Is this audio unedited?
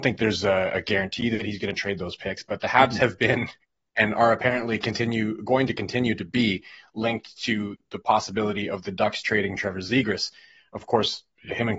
yes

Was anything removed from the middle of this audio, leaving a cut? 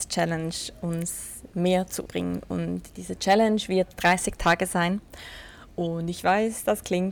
yes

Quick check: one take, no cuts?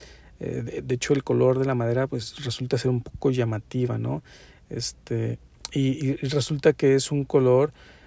yes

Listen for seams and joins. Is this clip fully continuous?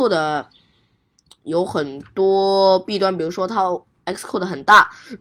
yes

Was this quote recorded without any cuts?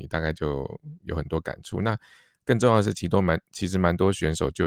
yes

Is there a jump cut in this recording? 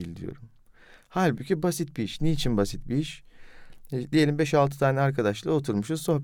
no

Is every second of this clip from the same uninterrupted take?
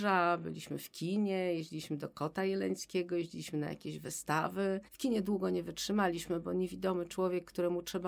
no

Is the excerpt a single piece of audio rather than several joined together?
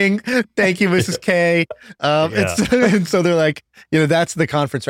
yes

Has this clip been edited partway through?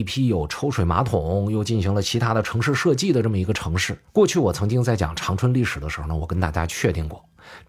yes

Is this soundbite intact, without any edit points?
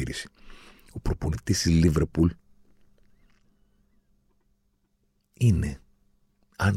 yes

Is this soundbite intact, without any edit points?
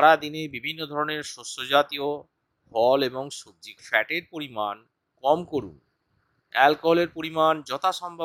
no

